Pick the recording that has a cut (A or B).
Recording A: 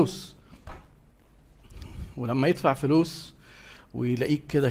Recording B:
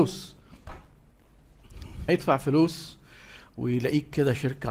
B